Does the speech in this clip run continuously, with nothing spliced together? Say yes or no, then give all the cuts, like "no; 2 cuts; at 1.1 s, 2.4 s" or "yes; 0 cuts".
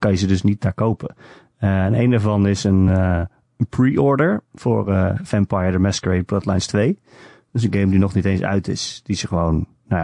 yes; 0 cuts